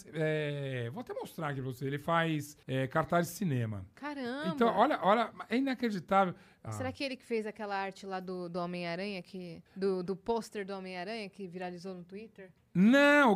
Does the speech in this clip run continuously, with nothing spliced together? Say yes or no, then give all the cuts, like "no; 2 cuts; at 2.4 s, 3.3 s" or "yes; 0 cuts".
no; 3 cuts; at 2.6 s, 6.7 s, 9.7 s